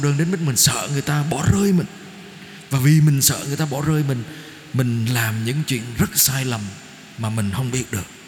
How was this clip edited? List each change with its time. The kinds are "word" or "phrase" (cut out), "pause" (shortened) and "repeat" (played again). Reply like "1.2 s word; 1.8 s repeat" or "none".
none

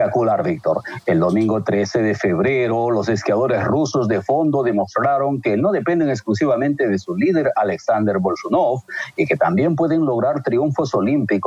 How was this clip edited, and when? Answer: none

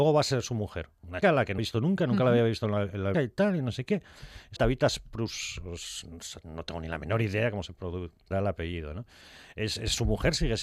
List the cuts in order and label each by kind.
1.2 s word; 1.6 s word; 3.1 s word; 4.6 s word; 8.3 s word

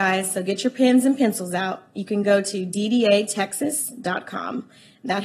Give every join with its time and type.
none

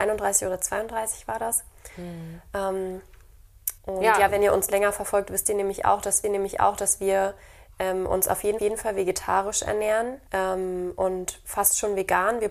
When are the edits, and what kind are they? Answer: 3.8 s pause; 6.2 s repeat; 8.6 s repeat; 10.3 s pause

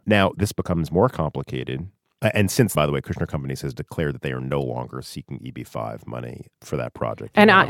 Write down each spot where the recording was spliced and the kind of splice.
2.7 s word

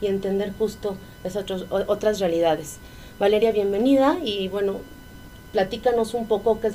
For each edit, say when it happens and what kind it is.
none

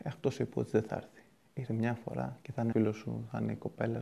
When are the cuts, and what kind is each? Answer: 1.7 s word; 2.7 s word

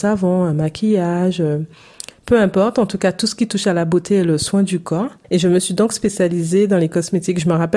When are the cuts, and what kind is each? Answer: 5.2 s pause

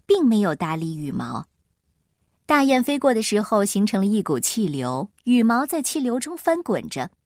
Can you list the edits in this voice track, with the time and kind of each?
5.2 s pause

